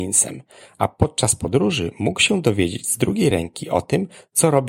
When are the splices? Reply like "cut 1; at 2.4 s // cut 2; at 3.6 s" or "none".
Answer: none